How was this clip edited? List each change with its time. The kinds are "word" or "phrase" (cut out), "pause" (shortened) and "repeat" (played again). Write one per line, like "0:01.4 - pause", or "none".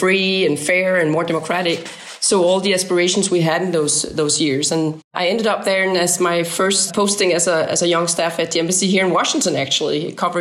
none